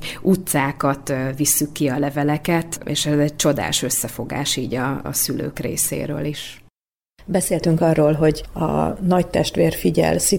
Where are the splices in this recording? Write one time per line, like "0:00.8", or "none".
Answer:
none

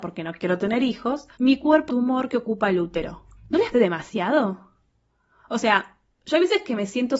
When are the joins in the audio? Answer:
0:01.3
0:01.9
0:03.4
0:03.7

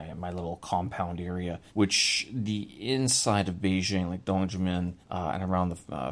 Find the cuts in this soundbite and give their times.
0:01.7
0:05.0

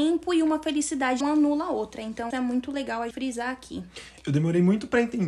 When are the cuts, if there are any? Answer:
0:01.2
0:02.3
0:03.1

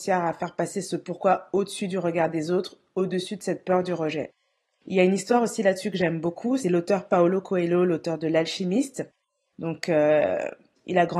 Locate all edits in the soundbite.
none

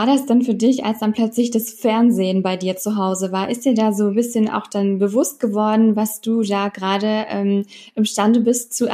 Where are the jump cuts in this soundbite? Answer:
none

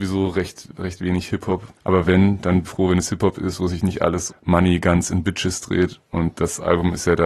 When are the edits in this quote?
0:01.8
0:02.6
0:04.3

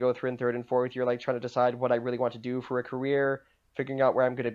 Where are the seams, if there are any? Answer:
none

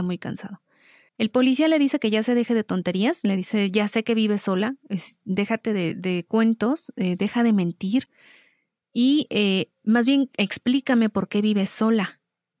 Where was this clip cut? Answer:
none

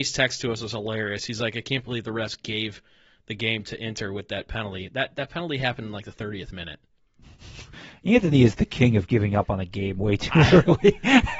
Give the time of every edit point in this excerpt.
none

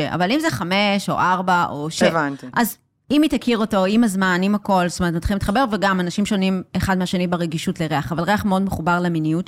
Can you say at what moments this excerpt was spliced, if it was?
none

